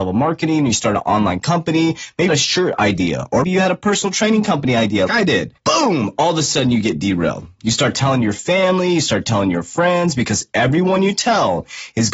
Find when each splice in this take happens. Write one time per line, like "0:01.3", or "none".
0:02.3
0:03.4
0:05.1
0:05.6